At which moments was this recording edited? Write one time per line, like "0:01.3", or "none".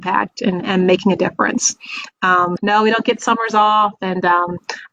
0:02.6